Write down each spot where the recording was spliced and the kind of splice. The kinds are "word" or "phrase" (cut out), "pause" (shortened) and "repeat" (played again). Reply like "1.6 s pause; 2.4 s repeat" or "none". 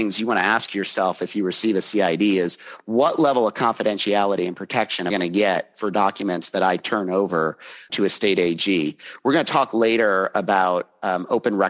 5.1 s word; 7.9 s word